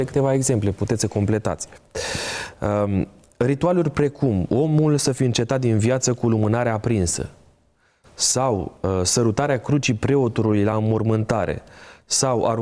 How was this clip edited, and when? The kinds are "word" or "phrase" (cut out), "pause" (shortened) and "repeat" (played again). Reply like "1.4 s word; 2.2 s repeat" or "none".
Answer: none